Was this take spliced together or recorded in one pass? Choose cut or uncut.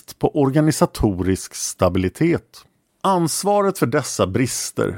uncut